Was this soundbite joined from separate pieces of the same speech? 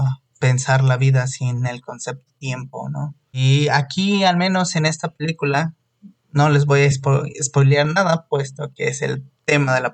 no; 0 cuts

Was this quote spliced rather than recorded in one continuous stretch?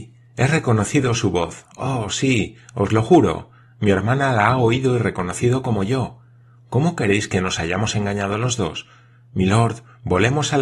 no; 0 cuts

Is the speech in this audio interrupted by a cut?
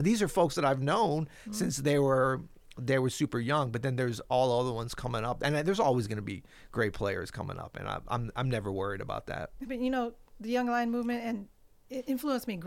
no; 0 cuts

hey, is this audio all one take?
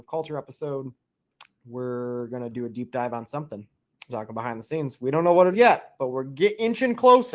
no; 2 cuts; at 4.1 s, 5.5 s

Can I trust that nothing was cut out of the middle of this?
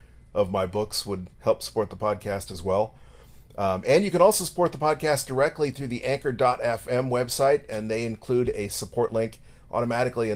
no; 1 cut; at 1.3 s

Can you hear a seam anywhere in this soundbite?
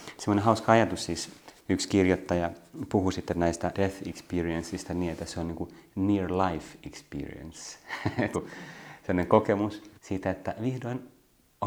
yes; 4 cuts; at 1.6 s, 3.7 s, 8.3 s, 10.0 s

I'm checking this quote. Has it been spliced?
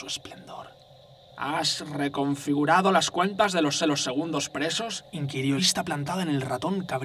yes; 2 cuts; at 3.8 s, 5.6 s

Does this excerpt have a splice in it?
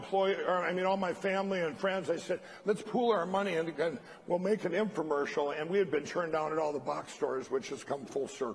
no; 0 cuts

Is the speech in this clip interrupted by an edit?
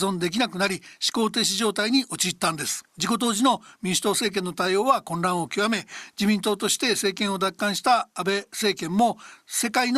yes; 1 cut; at 2.9 s

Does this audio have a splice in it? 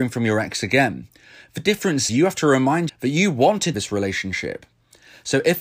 yes; 3 cuts; at 2.1 s, 2.9 s, 3.7 s

